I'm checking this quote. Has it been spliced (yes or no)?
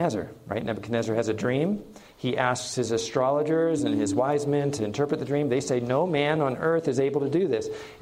no